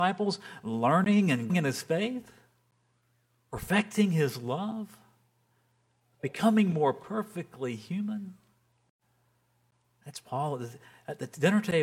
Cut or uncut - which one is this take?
cut